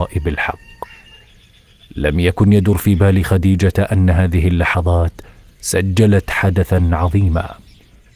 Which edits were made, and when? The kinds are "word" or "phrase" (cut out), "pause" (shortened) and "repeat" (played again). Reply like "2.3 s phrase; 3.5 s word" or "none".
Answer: none